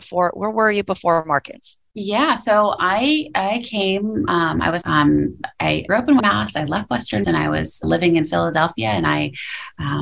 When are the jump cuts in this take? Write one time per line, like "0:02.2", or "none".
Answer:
0:02.8
0:04.8
0:05.9
0:06.2
0:07.2
0:07.8